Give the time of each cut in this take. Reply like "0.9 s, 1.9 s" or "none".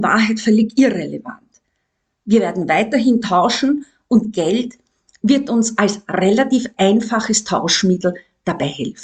none

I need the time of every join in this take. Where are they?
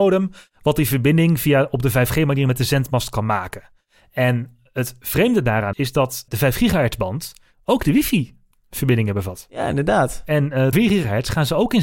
5.7 s, 6.3 s, 10.7 s

